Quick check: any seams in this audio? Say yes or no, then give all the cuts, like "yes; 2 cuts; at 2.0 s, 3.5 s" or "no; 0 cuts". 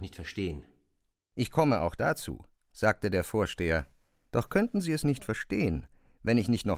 no; 0 cuts